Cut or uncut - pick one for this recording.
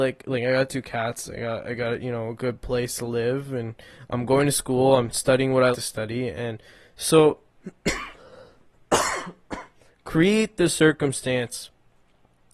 cut